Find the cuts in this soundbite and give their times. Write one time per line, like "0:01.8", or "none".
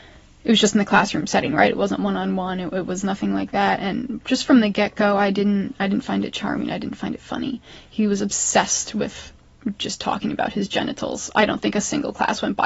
none